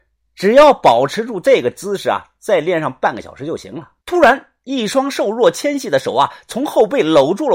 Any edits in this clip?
yes; 1 cut; at 4.0 s

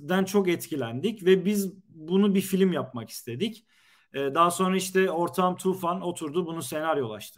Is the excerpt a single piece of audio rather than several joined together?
yes; 0 cuts

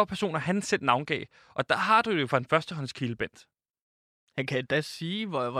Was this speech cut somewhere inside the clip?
no; 0 cuts

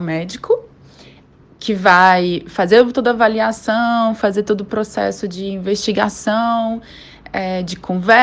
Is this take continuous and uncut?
yes; 0 cuts

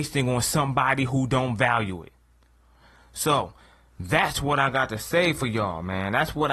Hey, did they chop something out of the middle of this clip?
no; 0 cuts

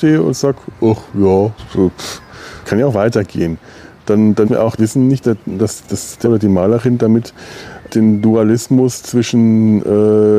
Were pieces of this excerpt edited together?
yes; 8 cuts; at 1.6 s, 2.6 s, 4.4 s, 4.8 s, 5.2 s, 5.8 s, 6.2 s, 7.9 s

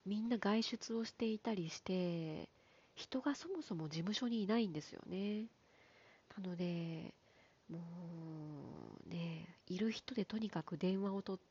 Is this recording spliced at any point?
no; 0 cuts

